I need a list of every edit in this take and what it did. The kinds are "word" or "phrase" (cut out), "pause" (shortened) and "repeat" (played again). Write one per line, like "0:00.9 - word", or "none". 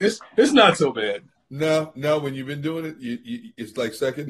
none

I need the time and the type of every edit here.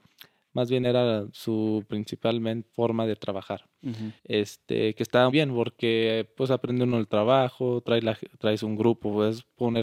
0:02.7 - pause
0:04.2 - pause
0:05.3 - word

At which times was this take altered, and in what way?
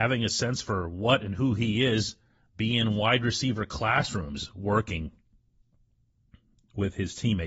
none

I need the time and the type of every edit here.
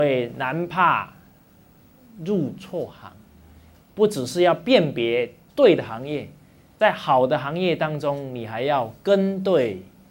none

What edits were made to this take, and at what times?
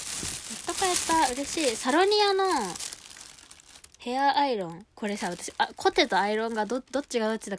0:03.9 - pause
0:04.9 - pause

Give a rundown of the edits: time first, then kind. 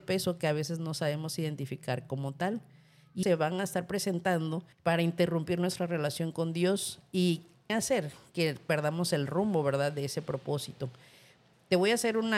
0:03.2 - word
0:04.7 - pause
0:07.7 - word

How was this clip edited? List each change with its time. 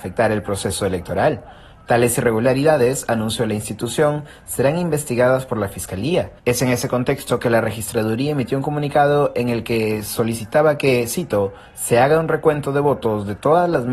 0:06.4 - pause

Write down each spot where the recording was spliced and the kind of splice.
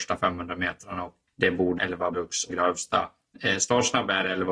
0:01.3 - word
0:01.8 - word
0:02.1 - word
0:02.5 - word

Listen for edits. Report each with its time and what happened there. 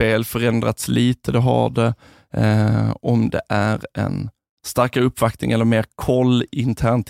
none

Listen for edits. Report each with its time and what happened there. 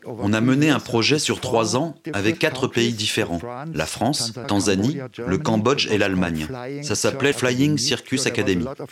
0:02.3 - word
0:04.4 - word
0:07.3 - word

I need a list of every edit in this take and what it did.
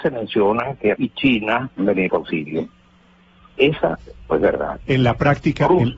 0:00.9 - word
0:01.8 - word
0:02.1 - word
0:04.3 - word

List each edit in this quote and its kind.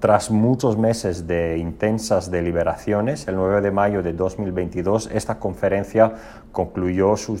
none

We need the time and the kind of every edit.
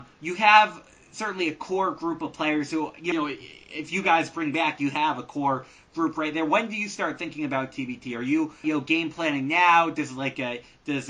0:03.1 - phrase
0:08.6 - word

